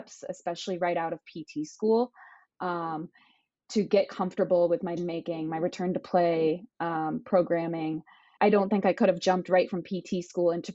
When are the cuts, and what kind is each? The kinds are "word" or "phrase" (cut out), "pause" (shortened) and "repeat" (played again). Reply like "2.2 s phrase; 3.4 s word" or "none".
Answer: 5.0 s word; 8.4 s word